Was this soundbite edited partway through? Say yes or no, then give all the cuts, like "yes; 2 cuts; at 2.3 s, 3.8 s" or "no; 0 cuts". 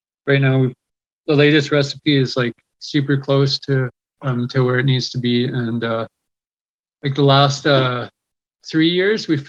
no; 0 cuts